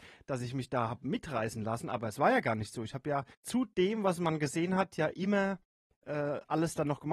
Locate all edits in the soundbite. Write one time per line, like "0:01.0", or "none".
0:03.3